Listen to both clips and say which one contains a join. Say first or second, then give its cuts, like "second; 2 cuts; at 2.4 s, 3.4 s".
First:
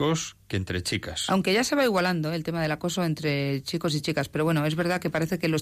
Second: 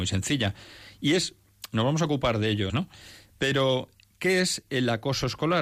second; 1 cut; at 2.7 s